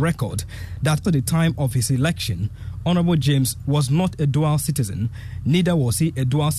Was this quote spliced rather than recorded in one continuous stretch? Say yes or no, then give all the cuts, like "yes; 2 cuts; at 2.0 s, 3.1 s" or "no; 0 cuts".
yes; 2 cuts; at 1.0 s, 3.6 s